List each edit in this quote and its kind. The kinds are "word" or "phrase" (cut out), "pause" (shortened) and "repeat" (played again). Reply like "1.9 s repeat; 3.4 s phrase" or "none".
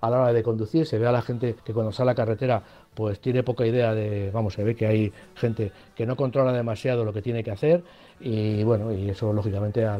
1.6 s pause